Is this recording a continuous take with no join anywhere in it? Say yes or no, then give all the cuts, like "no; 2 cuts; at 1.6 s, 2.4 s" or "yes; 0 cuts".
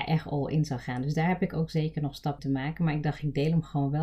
no; 1 cut; at 2.4 s